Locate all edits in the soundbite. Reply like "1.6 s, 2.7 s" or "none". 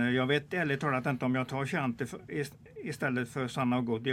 none